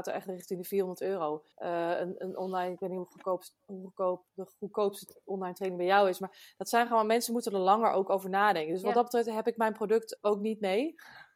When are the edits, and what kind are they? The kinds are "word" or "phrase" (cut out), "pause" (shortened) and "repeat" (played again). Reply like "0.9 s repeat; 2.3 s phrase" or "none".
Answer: 1.5 s pause; 4.3 s pause